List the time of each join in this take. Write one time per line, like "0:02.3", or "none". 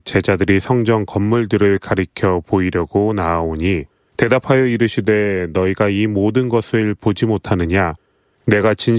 none

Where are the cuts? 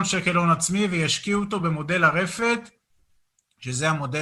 none

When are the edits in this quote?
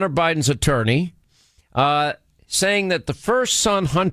none

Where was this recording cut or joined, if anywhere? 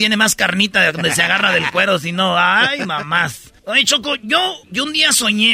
0:03.6
0:04.6

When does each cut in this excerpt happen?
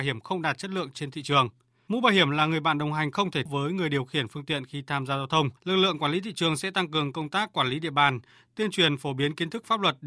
0:03.5
0:05.6

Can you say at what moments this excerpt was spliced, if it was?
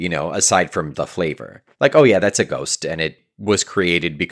0:00.9
0:01.7

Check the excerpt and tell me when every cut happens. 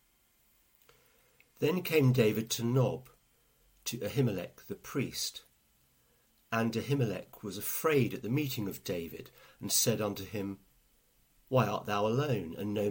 none

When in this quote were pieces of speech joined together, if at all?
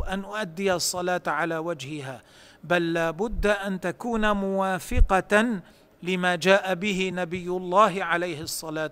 none

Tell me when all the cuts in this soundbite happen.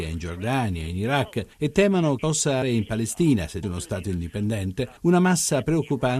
0:01.5
0:02.2
0:02.6
0:03.6
0:05.0

